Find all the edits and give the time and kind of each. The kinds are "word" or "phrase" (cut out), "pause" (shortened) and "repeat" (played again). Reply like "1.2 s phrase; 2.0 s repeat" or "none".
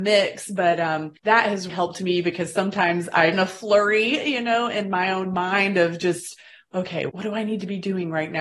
1.2 s pause; 1.7 s word; 3.3 s phrase; 7.1 s word